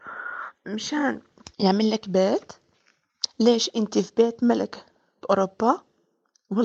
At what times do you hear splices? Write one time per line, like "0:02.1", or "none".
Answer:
0:01.5